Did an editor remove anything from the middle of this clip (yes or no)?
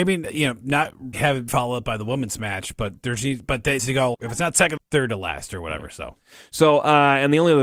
yes